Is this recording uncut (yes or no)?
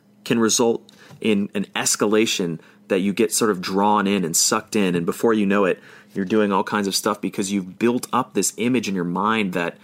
yes